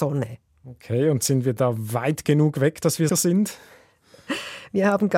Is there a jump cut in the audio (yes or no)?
yes